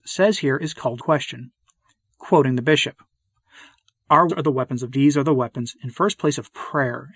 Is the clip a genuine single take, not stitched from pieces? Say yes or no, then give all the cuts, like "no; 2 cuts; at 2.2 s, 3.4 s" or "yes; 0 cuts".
no; 3 cuts; at 1.0 s, 4.3 s, 4.9 s